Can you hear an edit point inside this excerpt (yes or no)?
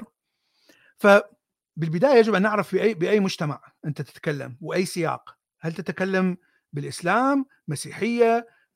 no